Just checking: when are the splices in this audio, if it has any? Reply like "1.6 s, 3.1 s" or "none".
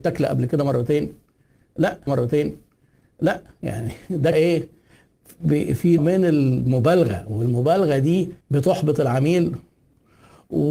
2.1 s, 4.3 s, 6.0 s, 8.4 s